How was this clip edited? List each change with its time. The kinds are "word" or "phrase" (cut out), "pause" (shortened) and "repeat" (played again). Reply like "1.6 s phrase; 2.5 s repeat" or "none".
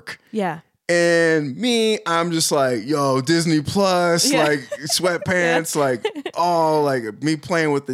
none